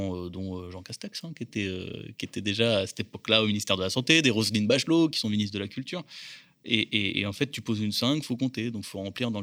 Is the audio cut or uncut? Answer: uncut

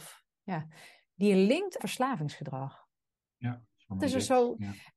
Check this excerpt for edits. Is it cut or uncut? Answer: cut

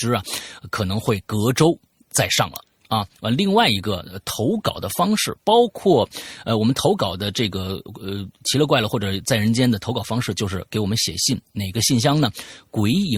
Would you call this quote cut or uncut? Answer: uncut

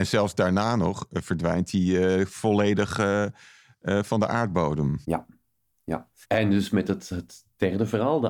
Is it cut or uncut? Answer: cut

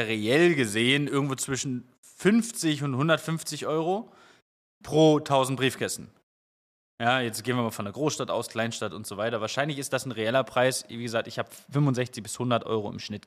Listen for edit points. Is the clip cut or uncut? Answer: uncut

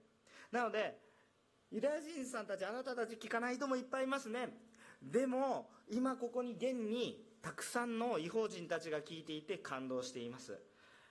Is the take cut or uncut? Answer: uncut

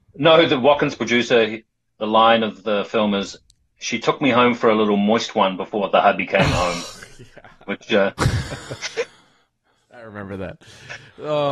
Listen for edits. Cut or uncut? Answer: uncut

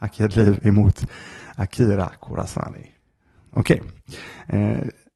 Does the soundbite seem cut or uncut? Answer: uncut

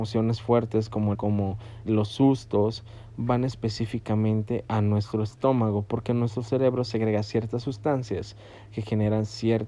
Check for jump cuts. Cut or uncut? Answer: cut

